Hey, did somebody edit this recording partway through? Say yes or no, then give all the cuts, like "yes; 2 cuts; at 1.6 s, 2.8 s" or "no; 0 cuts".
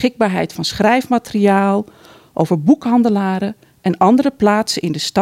no; 0 cuts